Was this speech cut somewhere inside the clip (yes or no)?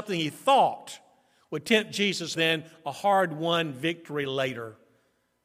yes